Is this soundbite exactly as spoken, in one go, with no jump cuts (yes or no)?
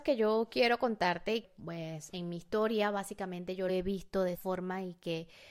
no